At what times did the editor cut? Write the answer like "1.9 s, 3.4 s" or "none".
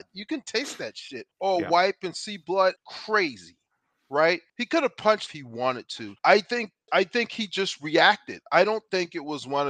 1.3 s, 2.8 s, 4.5 s, 5.3 s, 6.2 s, 6.9 s